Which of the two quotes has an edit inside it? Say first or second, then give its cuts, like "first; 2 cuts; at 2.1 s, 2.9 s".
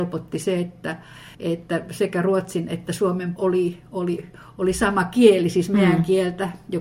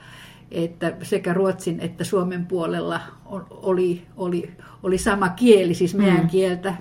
first; 2 cuts; at 1.3 s, 3.4 s